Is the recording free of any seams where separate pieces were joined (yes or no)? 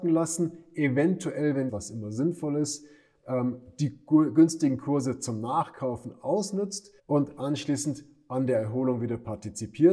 no